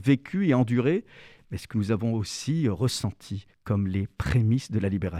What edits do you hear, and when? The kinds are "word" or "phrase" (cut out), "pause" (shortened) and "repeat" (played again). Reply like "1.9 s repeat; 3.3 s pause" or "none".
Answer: 3.5 s pause